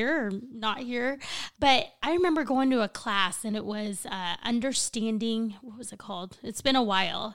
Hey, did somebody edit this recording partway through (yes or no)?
yes